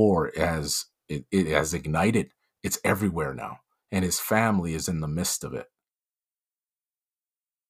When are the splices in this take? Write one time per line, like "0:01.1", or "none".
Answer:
none